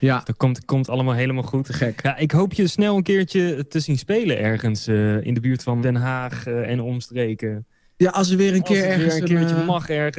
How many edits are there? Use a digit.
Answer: 1